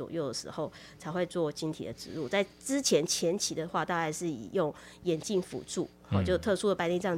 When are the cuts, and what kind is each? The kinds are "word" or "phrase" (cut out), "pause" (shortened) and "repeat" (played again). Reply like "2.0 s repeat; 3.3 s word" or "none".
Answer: none